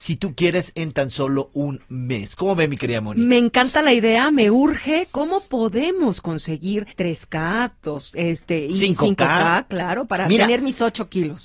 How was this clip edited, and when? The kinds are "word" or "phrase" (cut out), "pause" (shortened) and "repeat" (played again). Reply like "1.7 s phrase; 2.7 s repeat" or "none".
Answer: 6.9 s pause